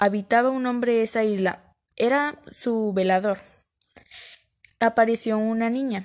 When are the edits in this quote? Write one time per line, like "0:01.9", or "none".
none

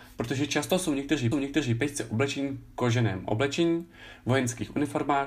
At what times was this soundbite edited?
0:01.3

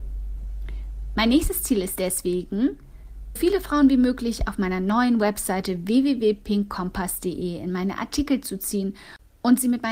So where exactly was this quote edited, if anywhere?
0:03.4

